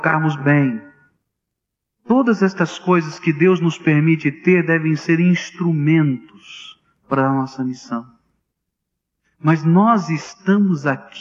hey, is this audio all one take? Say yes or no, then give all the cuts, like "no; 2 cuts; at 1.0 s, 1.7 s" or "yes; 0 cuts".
yes; 0 cuts